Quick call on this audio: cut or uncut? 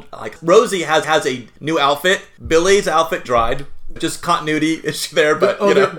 cut